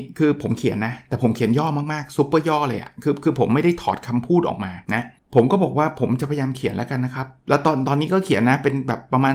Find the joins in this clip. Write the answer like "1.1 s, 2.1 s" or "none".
4.8 s, 5.2 s